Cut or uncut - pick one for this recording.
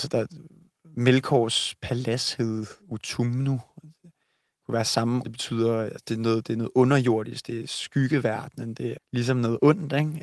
cut